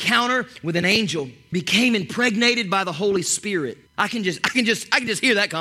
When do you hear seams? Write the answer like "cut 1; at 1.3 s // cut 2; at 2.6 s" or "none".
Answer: cut 1; at 1.5 s // cut 2; at 3.9 s

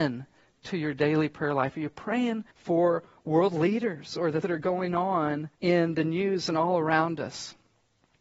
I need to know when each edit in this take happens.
cut 1; at 2.5 s // cut 2; at 4.4 s // cut 3; at 5.5 s

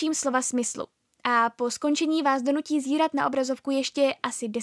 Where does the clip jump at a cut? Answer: none

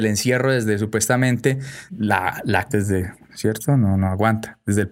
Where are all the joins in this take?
cut 1; at 1.9 s // cut 2; at 2.7 s

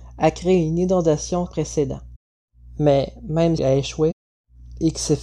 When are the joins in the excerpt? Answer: cut 1; at 1.5 s // cut 2; at 3.6 s

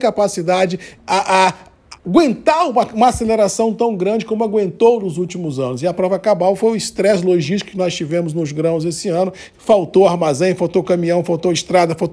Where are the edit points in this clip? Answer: cut 1; at 1.0 s // cut 2; at 2.0 s // cut 3; at 9.5 s

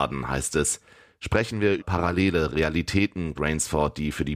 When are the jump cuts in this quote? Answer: cut 1; at 1.8 s // cut 2; at 3.4 s

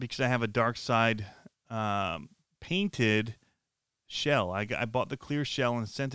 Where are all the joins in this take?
none

